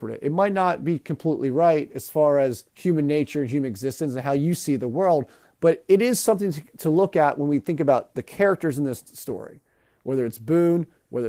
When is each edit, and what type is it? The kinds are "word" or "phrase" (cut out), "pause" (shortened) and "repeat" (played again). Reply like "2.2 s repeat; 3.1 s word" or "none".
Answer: 2.7 s pause